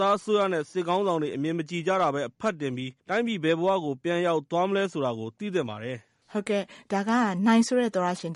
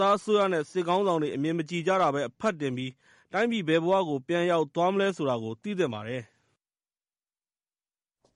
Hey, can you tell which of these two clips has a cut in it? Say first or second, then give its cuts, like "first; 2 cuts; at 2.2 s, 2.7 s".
first; 2 cuts; at 3.0 s, 6.2 s